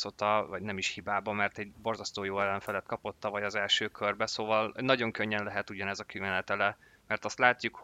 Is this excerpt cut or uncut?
uncut